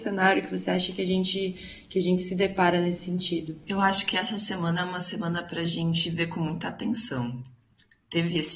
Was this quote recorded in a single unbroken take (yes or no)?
yes